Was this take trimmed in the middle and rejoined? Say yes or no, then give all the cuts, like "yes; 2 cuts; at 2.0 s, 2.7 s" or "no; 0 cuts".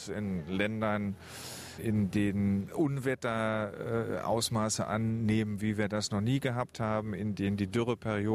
no; 0 cuts